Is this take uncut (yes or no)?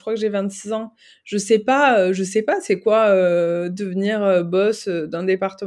yes